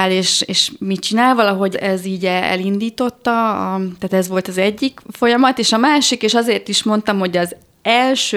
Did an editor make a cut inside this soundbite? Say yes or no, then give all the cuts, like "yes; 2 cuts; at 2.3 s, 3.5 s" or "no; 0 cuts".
yes; 1 cut; at 1.7 s